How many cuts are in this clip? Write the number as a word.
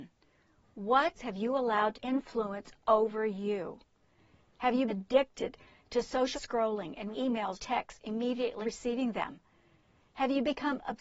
seven